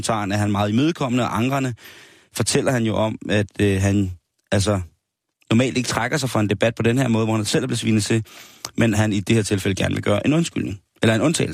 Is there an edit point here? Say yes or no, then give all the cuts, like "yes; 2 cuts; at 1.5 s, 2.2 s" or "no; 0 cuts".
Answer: no; 0 cuts